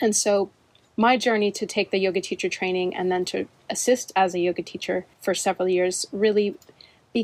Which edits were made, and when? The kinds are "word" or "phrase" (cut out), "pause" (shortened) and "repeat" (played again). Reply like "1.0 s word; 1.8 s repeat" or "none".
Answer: 5.1 s pause